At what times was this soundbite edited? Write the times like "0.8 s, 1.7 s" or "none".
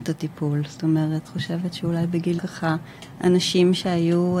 1.2 s, 2.4 s